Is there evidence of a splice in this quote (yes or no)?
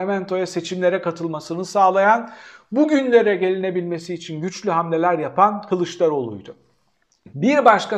no